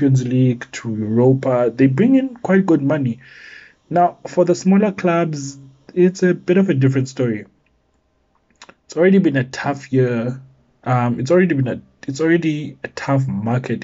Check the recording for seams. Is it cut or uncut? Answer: uncut